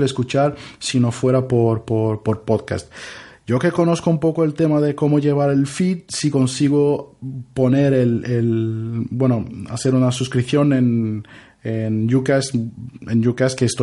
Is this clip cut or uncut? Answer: uncut